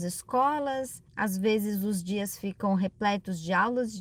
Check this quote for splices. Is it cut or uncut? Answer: cut